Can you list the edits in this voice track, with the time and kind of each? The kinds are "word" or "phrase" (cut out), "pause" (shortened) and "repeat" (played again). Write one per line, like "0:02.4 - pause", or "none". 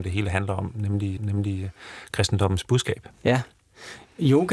0:01.2 - repeat